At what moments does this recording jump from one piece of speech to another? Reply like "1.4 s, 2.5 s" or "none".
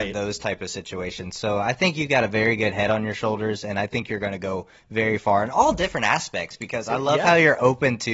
none